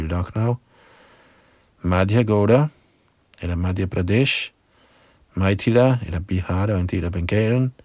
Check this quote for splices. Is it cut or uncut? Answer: uncut